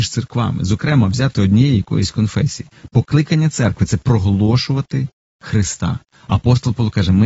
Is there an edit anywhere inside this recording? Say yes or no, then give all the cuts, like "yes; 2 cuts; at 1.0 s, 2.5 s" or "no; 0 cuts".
no; 0 cuts